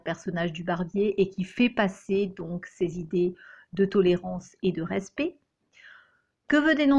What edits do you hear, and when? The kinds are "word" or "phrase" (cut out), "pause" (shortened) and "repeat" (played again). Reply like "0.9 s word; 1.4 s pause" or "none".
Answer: none